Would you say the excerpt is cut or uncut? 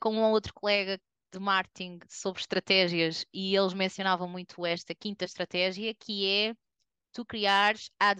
uncut